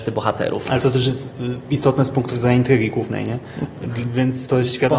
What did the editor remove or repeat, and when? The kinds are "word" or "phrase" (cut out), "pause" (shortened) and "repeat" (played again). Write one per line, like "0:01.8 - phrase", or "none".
none